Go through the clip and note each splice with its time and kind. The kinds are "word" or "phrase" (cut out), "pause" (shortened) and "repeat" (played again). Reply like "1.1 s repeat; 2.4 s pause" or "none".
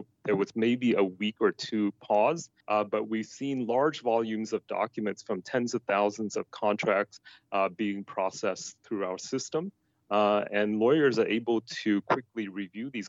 2.6 s pause

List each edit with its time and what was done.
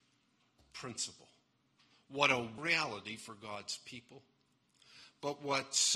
2.6 s word

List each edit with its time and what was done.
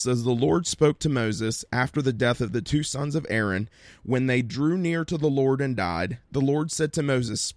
none

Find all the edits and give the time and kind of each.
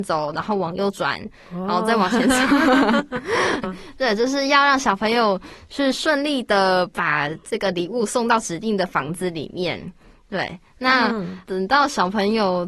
3.6 s word

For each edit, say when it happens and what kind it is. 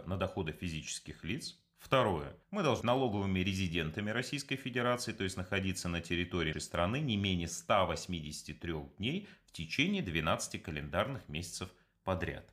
2.4 s pause; 2.8 s word; 6.5 s word

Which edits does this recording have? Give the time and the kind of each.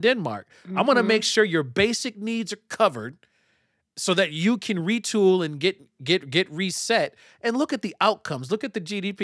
none

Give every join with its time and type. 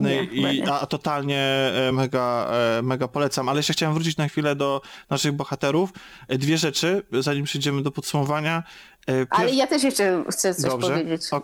none

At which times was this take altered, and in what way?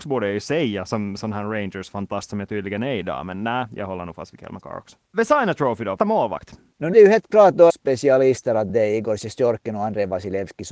6.0 s word; 6.9 s word; 7.7 s phrase

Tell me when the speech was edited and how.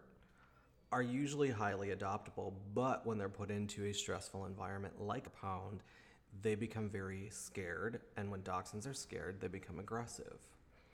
5.3 s phrase

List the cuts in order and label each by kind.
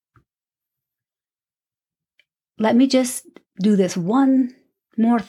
none

